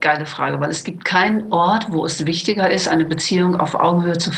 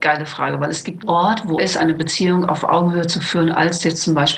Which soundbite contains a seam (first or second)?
second